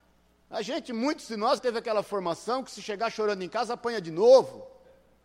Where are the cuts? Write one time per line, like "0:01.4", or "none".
0:01.6